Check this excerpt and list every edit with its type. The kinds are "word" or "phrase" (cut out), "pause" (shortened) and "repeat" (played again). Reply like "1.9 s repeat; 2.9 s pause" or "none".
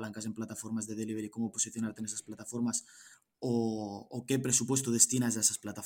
none